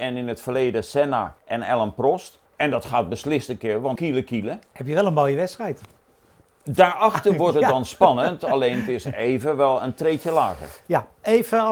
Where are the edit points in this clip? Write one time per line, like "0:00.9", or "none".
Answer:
0:01.4
0:02.5
0:04.0